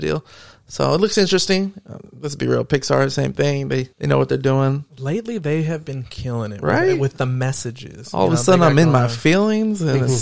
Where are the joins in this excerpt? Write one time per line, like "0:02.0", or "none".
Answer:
0:03.9